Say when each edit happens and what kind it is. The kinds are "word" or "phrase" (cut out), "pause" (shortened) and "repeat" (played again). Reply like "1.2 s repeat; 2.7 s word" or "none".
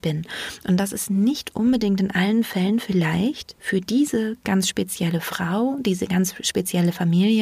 none